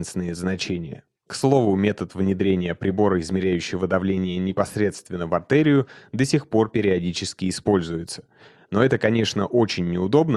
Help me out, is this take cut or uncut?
uncut